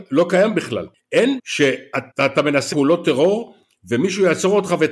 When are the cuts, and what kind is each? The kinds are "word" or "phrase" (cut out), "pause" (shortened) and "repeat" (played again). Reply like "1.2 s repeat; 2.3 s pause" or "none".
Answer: 1.4 s word; 2.1 s pause; 2.7 s word